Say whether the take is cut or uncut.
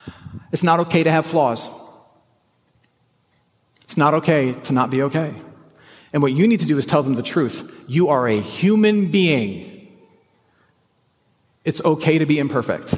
uncut